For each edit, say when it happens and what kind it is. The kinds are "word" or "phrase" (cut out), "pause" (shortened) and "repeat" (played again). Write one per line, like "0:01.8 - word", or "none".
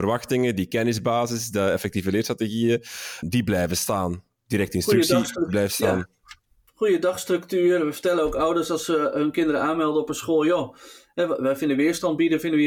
0:03.2 - word